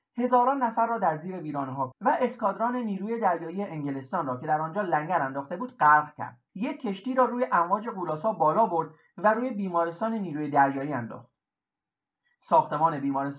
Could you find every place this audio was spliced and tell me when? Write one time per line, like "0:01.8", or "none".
0:01.9
0:06.5